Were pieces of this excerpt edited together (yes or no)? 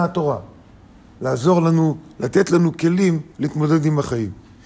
yes